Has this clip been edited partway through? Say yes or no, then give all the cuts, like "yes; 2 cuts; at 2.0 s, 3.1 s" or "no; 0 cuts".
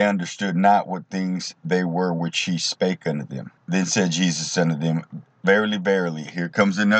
yes; 2 cuts; at 1.6 s, 3.6 s